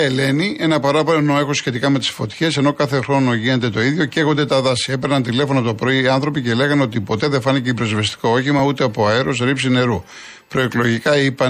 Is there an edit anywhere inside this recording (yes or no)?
no